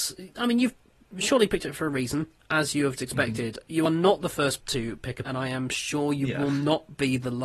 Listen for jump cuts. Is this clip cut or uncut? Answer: cut